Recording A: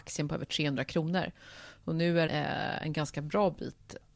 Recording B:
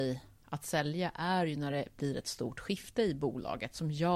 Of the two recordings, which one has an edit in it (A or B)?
A